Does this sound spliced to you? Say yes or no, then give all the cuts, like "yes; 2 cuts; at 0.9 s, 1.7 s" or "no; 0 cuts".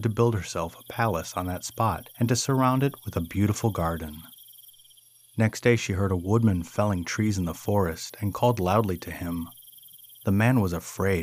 no; 0 cuts